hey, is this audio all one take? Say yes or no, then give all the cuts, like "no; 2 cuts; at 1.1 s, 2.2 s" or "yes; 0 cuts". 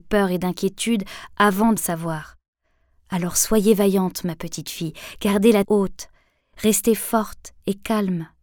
no; 2 cuts; at 1.8 s, 5.6 s